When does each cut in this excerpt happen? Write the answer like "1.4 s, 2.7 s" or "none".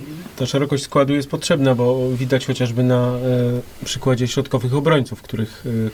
none